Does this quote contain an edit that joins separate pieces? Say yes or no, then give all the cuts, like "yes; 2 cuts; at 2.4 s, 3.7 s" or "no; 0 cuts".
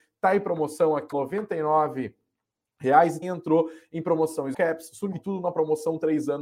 yes; 4 cuts; at 1.1 s, 3.2 s, 4.5 s, 5.1 s